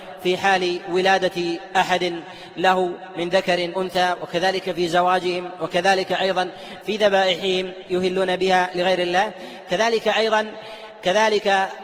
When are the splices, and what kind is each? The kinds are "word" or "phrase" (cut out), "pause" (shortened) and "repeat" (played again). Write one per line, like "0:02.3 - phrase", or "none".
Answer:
0:03.7 - word